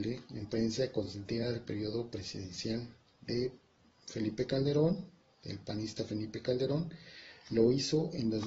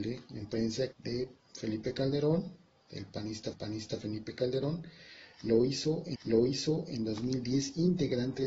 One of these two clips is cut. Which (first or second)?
second